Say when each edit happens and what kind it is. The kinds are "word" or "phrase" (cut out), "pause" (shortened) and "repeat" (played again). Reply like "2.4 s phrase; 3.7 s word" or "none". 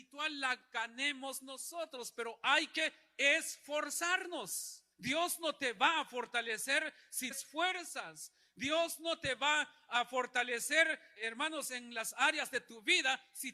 4.9 s pause; 7.3 s phrase; 11.2 s word